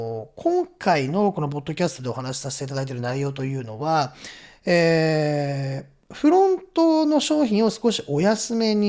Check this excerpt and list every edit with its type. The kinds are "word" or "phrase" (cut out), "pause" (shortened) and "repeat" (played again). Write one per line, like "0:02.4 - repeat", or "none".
none